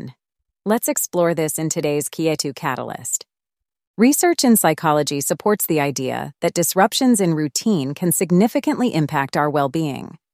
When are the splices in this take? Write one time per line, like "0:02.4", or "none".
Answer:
none